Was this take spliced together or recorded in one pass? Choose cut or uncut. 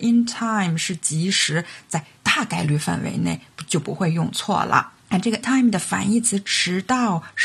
cut